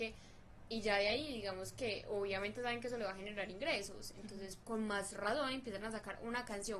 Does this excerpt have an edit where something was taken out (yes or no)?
no